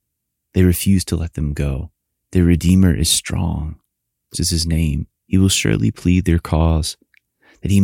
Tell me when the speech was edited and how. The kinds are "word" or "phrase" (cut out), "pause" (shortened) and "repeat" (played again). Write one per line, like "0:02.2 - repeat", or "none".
0:02.0 - pause
0:04.3 - phrase
0:05.2 - pause